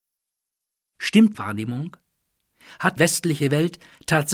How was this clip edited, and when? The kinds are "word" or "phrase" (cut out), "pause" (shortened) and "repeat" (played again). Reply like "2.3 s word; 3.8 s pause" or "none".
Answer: 1.3 s word; 3.0 s word